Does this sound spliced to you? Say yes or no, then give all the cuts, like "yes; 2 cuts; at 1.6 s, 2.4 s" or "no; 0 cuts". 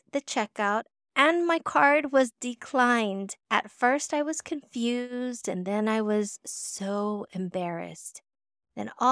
yes; 1 cut; at 3.4 s